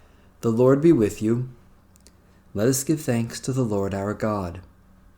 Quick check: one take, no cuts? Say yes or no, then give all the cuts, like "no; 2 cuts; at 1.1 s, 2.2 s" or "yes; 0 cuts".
yes; 0 cuts